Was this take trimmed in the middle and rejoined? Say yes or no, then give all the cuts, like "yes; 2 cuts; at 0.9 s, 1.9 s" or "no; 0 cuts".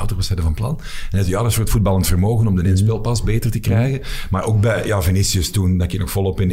no; 0 cuts